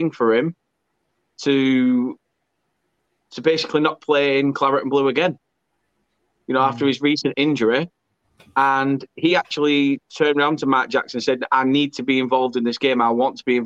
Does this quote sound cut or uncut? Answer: uncut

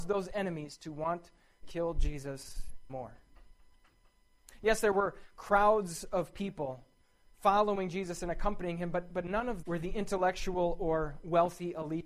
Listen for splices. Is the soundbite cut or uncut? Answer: cut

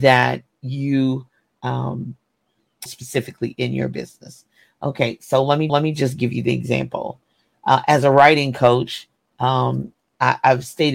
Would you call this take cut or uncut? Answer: cut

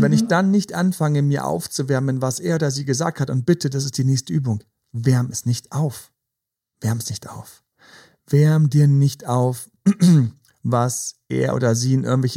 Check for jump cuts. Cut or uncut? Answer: uncut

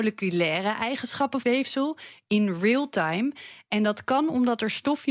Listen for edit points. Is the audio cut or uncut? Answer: cut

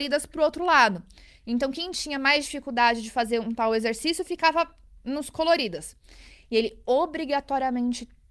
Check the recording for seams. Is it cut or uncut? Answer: uncut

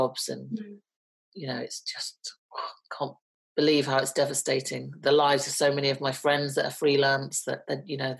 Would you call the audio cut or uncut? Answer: uncut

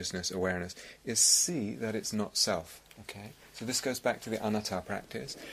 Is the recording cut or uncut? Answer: cut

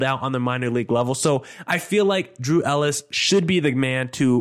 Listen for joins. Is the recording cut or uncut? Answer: uncut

